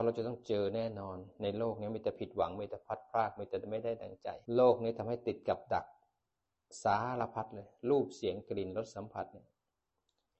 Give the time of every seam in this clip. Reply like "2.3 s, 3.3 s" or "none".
4.4 s